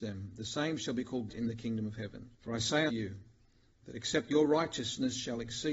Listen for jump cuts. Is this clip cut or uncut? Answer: cut